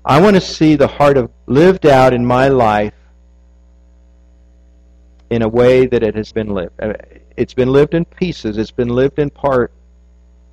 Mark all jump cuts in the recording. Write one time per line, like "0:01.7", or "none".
0:01.3
0:06.3